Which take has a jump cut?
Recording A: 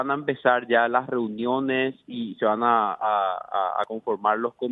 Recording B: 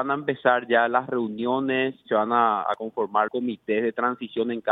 B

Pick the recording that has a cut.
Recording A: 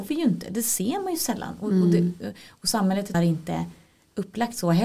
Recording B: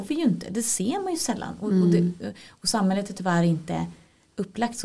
A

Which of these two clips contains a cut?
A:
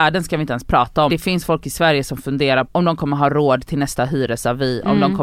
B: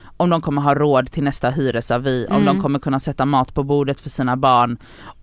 A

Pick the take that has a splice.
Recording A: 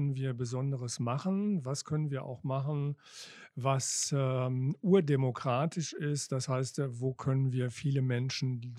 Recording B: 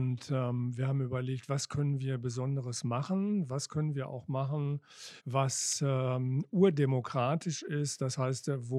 B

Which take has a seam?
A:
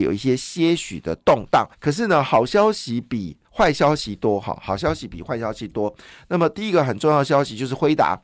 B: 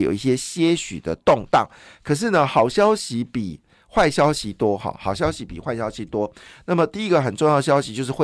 A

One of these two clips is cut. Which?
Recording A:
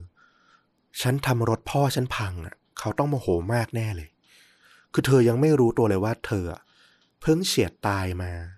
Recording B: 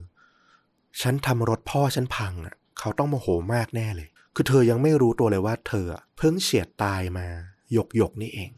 B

